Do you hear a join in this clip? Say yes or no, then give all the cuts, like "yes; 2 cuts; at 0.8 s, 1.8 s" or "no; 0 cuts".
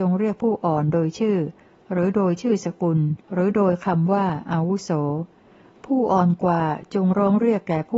yes; 1 cut; at 3.2 s